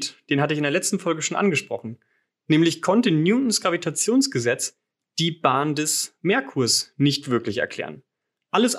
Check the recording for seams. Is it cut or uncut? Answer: uncut